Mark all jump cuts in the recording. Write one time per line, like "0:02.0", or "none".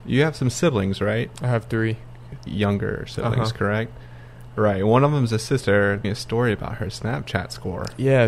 0:02.5
0:06.0